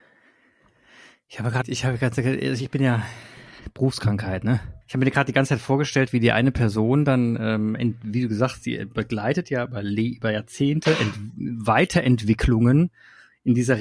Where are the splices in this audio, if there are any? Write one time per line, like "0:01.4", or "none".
0:01.6
0:04.8